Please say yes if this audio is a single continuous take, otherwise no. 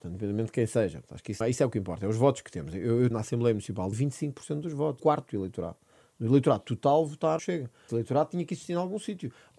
no